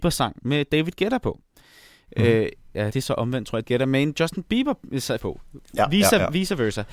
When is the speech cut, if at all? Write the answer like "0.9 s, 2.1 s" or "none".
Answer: 2.9 s, 3.6 s, 5.2 s